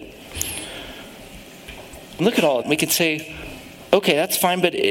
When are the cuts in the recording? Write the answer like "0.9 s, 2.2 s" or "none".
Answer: 2.2 s, 2.6 s